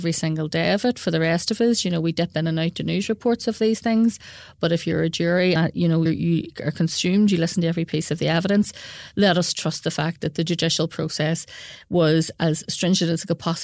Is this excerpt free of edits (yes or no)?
no